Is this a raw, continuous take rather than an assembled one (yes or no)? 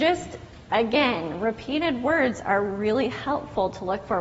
yes